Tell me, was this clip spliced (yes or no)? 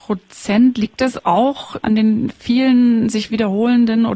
no